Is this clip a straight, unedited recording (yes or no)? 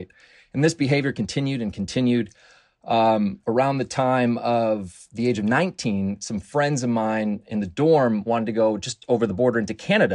yes